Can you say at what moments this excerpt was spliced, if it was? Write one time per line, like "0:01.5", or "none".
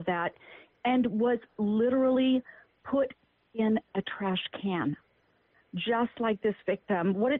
none

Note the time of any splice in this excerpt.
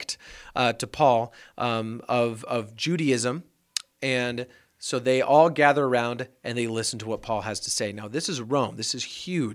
none

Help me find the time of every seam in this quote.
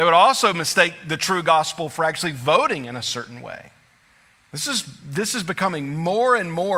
none

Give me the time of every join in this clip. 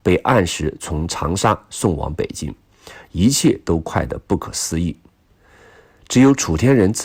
none

